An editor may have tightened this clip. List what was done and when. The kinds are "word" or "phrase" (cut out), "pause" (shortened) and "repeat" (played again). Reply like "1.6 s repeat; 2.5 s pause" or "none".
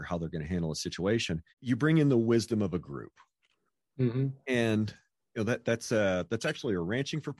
1.5 s pause; 5.2 s pause